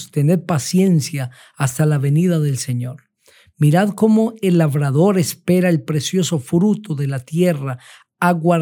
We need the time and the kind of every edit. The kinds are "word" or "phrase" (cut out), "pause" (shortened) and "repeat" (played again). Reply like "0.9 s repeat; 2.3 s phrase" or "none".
none